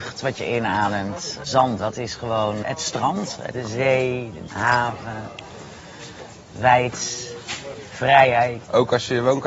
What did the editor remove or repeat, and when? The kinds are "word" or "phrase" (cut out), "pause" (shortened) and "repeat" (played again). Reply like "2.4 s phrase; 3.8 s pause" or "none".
1.8 s word; 4.5 s word